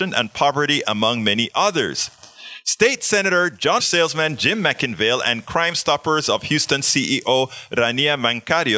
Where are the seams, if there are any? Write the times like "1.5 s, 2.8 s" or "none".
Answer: 3.8 s